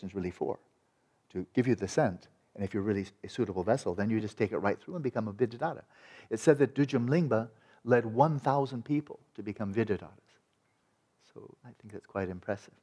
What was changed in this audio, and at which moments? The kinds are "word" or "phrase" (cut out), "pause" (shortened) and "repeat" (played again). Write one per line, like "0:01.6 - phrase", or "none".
none